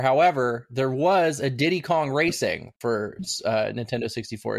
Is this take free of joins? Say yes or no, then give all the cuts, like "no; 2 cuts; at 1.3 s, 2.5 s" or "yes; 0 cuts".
no; 1 cut; at 2.8 s